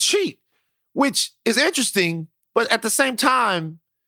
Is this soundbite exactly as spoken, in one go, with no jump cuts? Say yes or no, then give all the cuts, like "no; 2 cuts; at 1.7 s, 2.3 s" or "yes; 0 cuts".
yes; 0 cuts